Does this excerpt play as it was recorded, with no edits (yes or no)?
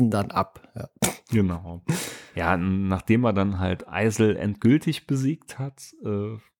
yes